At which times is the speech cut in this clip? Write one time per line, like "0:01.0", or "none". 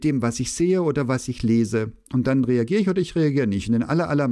none